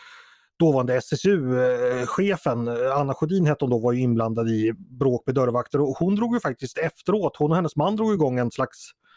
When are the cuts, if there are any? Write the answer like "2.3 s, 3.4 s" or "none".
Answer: none